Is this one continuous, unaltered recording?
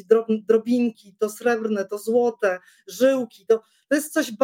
yes; 0 cuts

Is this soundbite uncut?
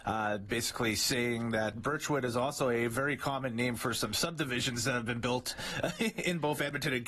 yes; 0 cuts

